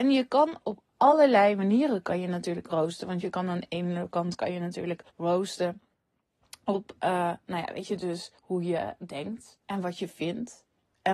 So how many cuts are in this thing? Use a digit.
3